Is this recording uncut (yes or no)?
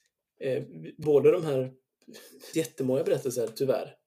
no